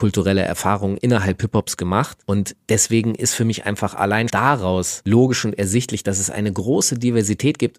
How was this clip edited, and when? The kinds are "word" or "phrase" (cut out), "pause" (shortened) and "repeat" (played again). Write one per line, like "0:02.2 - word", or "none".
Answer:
0:04.3 - word